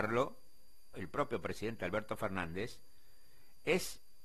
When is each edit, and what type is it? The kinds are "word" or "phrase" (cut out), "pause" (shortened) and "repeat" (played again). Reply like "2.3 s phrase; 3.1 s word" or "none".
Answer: 0.9 s word